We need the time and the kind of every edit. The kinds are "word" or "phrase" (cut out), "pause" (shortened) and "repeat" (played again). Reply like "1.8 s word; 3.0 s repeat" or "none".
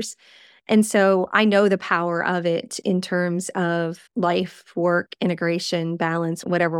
4.1 s pause